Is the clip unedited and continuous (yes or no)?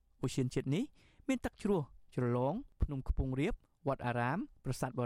yes